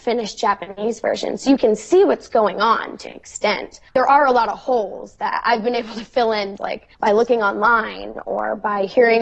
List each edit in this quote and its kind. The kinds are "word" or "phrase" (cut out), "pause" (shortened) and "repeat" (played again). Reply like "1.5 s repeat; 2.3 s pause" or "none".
3.0 s word; 3.9 s pause; 6.6 s word; 6.9 s pause